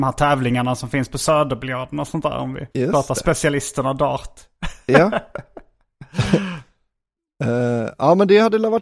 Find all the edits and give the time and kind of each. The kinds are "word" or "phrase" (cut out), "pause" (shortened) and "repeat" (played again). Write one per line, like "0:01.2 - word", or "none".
0:02.7 - pause